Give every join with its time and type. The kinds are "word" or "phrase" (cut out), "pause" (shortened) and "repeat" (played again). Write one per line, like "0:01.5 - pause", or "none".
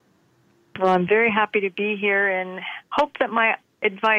none